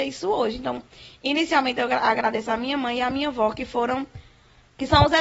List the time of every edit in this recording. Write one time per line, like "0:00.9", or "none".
none